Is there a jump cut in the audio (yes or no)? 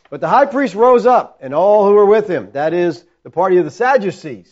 no